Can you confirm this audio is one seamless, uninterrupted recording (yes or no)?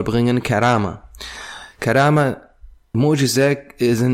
no